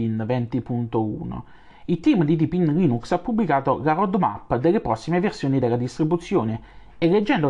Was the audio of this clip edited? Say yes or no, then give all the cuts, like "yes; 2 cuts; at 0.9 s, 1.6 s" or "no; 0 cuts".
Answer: no; 0 cuts